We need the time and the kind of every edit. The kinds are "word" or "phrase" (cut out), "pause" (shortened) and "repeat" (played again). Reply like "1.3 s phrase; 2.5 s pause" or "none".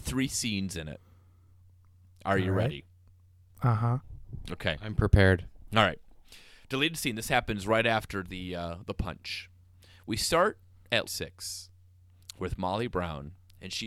11.0 s word